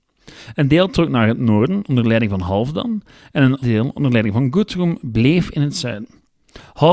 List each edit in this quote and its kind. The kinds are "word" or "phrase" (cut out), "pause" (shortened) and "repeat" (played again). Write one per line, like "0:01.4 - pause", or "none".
0:03.6 - word